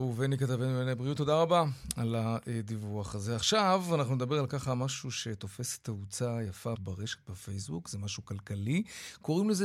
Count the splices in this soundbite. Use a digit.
1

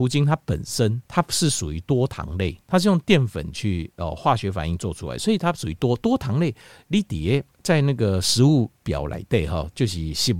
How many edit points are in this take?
4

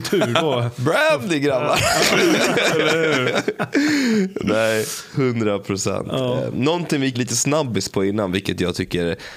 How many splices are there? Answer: 1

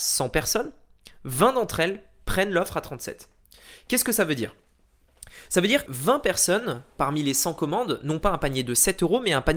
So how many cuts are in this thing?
1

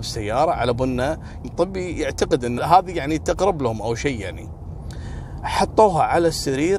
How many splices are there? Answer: 2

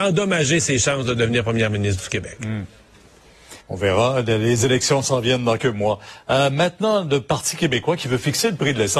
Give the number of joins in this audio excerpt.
2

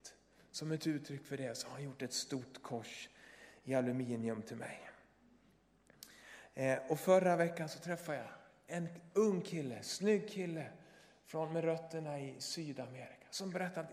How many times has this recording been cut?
0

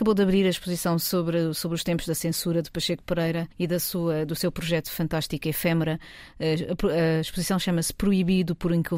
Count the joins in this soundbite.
1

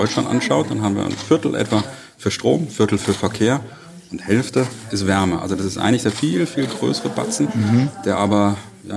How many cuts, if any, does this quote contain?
0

